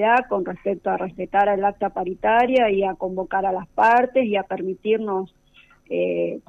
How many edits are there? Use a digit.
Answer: 0